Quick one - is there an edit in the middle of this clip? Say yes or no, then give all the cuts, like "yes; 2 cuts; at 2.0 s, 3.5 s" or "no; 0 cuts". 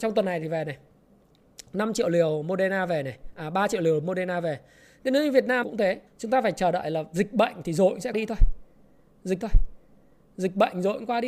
yes; 4 cuts; at 5.6 s, 6.1 s, 8.1 s, 9.4 s